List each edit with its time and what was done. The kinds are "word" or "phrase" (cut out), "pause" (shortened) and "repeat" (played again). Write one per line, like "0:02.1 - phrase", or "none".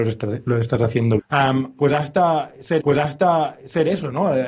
0:01.2 - word
0:02.8 - repeat